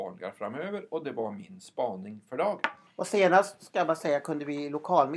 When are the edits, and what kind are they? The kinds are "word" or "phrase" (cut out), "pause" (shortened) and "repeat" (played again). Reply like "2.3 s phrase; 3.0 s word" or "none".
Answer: 2.9 s pause